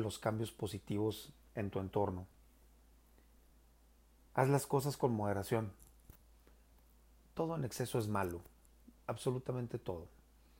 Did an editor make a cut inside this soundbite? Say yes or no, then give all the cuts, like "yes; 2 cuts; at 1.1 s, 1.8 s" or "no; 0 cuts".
no; 0 cuts